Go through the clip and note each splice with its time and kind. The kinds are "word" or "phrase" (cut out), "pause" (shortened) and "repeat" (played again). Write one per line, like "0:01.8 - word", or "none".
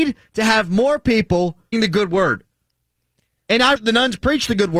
0:01.7 - word
0:03.8 - word